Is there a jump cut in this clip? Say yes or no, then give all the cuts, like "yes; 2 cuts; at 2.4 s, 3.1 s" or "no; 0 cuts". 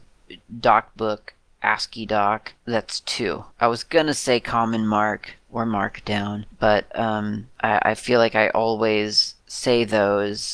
no; 0 cuts